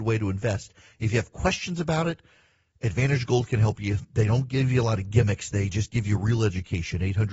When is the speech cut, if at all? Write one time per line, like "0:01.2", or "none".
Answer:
none